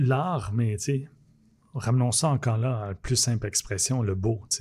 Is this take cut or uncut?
uncut